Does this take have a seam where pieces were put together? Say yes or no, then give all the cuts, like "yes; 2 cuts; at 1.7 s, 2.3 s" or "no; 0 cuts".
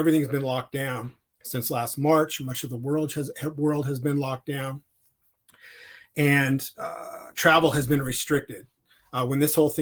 no; 0 cuts